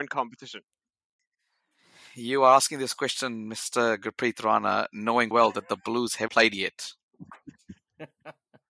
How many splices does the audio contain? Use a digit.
2